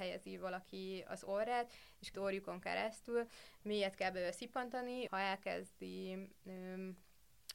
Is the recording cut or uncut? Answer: cut